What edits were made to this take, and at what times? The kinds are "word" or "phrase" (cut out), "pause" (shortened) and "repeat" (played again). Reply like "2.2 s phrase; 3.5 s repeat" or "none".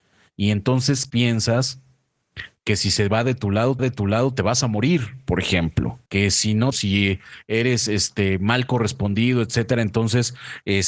1.1 s word; 3.8 s repeat; 6.1 s pause; 6.7 s phrase